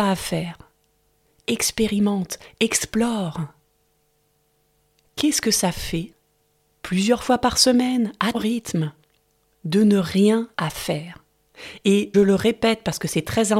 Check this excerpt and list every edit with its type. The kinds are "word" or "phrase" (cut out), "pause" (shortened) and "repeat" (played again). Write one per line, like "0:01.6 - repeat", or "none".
0:08.3 - word
0:10.5 - word
0:12.1 - word